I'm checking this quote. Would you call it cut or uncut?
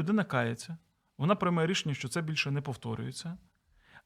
uncut